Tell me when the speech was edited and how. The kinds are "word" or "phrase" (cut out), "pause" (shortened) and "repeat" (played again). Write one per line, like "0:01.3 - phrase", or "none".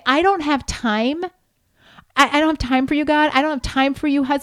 none